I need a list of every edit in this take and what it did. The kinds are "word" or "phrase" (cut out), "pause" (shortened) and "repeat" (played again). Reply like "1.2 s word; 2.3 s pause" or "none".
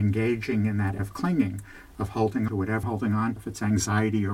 1.0 s word; 2.5 s word; 2.8 s word; 3.4 s word

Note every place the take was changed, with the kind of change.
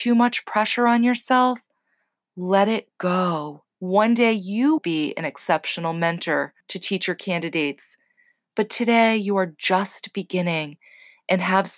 3.7 s pause; 4.8 s word; 6.6 s pause

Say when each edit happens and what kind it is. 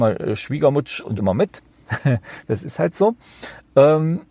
1.2 s phrase

